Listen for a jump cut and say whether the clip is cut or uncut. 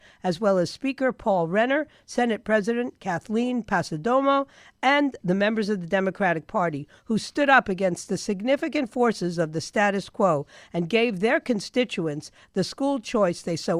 uncut